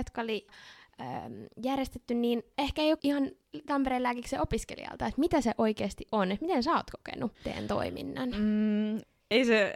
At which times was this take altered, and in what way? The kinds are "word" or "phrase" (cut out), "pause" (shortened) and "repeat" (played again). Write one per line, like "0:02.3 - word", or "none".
0:03.0 - word
0:07.3 - pause